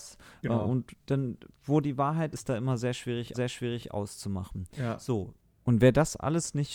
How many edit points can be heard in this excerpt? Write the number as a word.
three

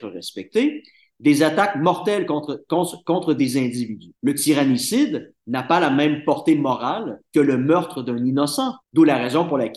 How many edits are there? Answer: three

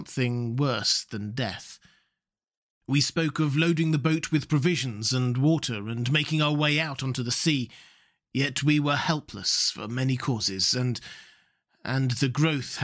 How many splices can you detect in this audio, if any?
zero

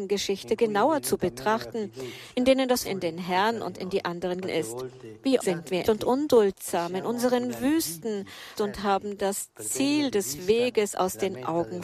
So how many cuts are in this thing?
five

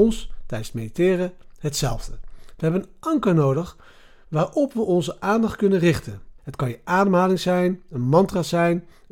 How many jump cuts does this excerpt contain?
one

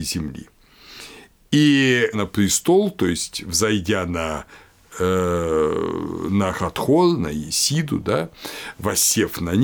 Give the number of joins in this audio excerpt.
one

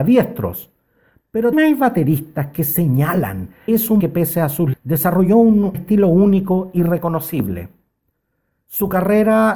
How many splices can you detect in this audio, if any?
five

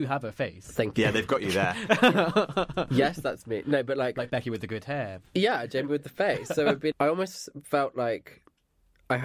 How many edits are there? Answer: one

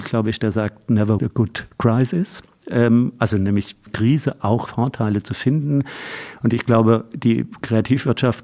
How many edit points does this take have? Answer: three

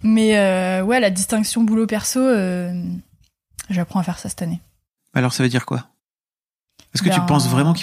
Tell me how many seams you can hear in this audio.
zero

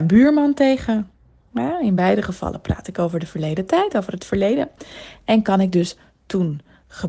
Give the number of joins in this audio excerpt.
zero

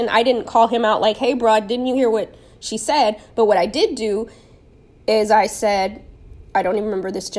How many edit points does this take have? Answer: zero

